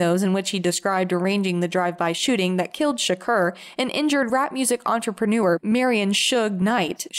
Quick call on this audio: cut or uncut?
uncut